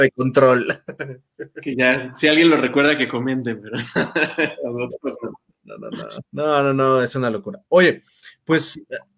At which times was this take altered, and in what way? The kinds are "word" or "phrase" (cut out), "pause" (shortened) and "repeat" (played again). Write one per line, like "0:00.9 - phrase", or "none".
0:06.2 - pause